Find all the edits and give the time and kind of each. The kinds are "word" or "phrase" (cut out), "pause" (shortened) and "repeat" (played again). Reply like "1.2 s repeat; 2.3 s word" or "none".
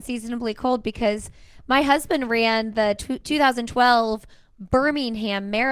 none